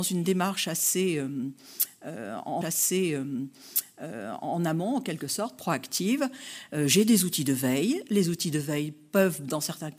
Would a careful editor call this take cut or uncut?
cut